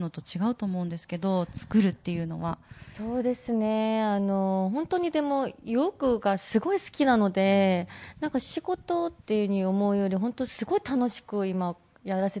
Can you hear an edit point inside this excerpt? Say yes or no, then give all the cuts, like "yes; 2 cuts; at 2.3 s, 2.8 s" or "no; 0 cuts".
yes; 1 cut; at 9.2 s